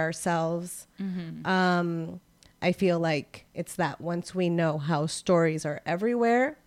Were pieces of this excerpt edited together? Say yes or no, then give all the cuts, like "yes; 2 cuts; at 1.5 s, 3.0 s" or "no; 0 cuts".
no; 0 cuts